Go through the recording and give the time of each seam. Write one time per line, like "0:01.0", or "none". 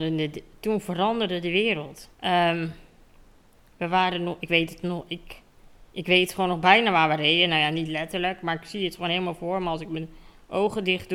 0:02.1
0:05.9